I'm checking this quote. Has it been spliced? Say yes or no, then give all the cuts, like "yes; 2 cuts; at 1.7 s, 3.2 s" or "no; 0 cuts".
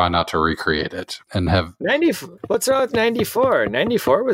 yes; 2 cuts; at 1.2 s, 2.4 s